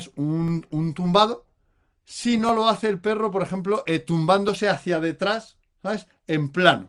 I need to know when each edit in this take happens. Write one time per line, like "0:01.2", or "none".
none